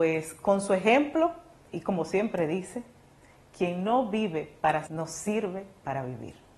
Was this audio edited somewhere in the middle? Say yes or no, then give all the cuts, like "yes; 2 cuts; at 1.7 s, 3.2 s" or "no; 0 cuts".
yes; 2 cuts; at 1.7 s, 4.9 s